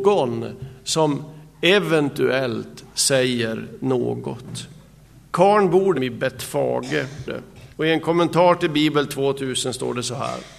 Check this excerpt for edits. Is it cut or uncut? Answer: cut